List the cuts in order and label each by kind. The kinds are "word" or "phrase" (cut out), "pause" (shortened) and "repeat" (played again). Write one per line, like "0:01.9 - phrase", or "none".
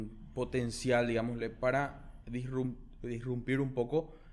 none